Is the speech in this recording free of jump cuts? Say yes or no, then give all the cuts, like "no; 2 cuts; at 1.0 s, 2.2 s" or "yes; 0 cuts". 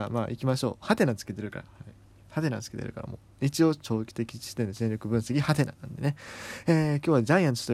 yes; 0 cuts